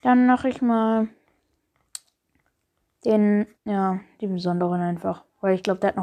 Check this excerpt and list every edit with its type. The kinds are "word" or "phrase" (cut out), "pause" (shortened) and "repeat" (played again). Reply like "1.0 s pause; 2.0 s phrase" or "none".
3.6 s pause